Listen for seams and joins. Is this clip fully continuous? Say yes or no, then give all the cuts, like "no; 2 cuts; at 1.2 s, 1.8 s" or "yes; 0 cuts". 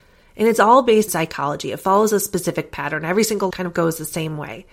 no; 2 cuts; at 1.1 s, 3.5 s